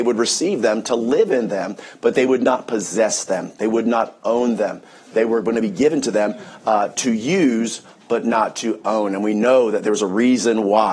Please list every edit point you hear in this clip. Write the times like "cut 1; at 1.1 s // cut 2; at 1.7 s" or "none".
none